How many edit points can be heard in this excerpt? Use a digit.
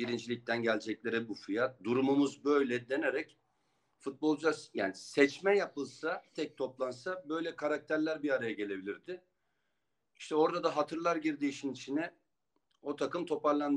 1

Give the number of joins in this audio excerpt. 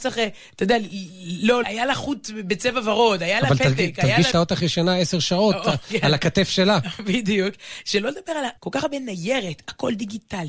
3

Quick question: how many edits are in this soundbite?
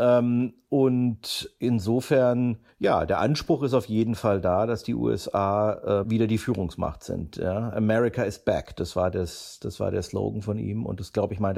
2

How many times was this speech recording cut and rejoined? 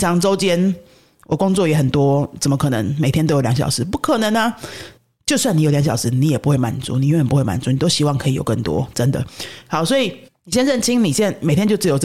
2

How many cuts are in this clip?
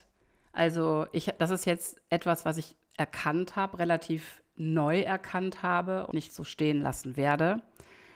1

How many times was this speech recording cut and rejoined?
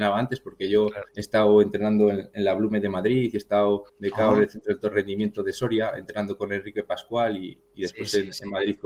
2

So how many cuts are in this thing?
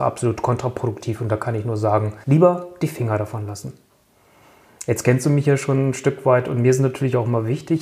1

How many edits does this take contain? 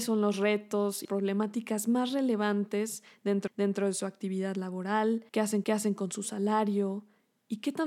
4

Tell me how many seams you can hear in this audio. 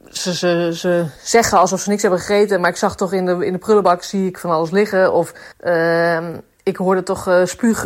2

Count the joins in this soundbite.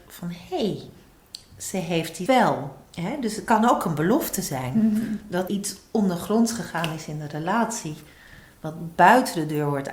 3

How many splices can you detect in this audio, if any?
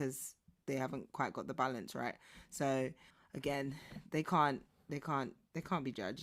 1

